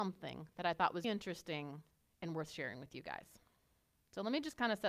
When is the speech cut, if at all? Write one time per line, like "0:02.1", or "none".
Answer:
0:01.0